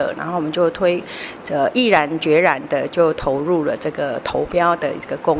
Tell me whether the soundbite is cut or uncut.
uncut